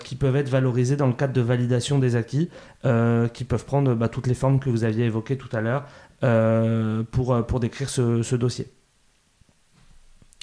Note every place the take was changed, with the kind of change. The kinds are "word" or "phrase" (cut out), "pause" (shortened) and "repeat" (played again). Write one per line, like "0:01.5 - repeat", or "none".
none